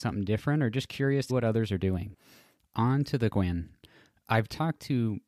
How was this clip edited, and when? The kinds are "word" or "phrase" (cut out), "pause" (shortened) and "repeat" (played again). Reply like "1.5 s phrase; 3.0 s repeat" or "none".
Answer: 1.3 s word; 3.3 s word